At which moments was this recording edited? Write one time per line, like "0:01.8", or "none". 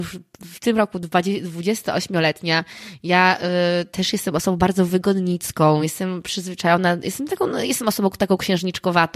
none

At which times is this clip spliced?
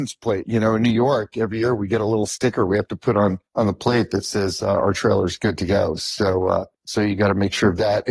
0:03.5
0:06.7

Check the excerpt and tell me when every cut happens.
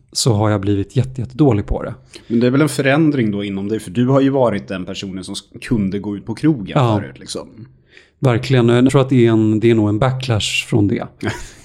0:06.2
0:08.9

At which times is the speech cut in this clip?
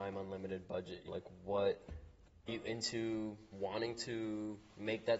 0:01.1
0:02.5

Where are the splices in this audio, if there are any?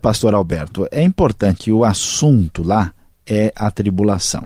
0:01.6

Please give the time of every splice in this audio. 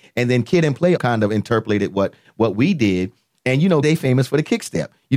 0:01.0
0:03.8

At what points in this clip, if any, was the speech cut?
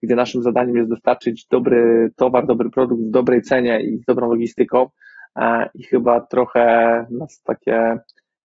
none

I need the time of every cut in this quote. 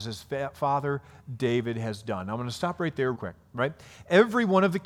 0:03.1

